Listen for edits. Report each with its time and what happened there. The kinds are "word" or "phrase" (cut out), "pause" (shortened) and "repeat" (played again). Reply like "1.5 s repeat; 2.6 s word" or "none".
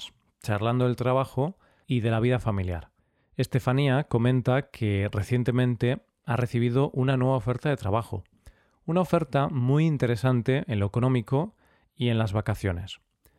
none